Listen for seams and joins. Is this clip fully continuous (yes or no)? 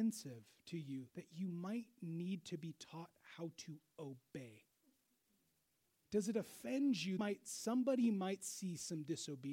no